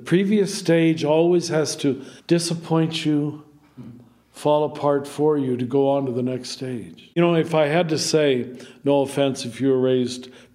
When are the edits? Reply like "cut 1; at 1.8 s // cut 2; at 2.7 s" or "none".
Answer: cut 1; at 2.2 s